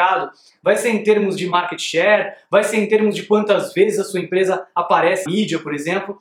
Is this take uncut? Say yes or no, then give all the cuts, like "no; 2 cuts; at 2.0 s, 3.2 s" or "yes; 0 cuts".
no; 1 cut; at 5.3 s